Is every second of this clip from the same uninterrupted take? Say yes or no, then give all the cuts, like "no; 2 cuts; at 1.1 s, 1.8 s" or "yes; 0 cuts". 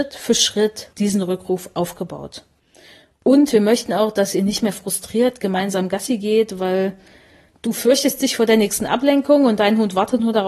no; 1 cut; at 0.9 s